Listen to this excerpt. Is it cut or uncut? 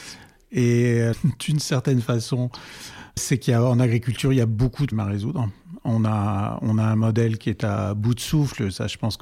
cut